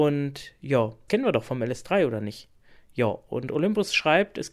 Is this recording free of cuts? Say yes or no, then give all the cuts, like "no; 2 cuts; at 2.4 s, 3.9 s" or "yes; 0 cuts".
no; 1 cut; at 1.1 s